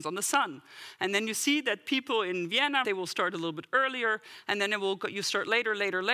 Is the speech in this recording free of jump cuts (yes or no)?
no